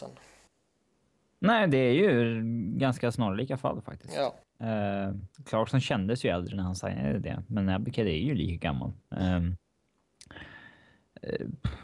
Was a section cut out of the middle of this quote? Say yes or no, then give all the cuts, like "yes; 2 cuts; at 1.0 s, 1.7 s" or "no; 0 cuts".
yes; 1 cut; at 5.3 s